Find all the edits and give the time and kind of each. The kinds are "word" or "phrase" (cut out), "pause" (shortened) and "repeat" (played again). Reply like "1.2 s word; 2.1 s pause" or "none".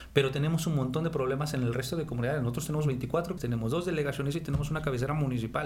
3.4 s word